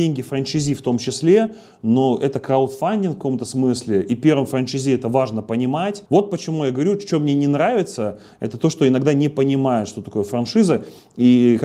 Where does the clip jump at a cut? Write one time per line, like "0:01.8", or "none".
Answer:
0:06.1